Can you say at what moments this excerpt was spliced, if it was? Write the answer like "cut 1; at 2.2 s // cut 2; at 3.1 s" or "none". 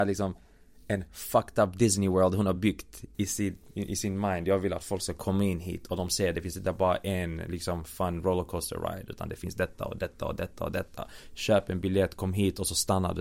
none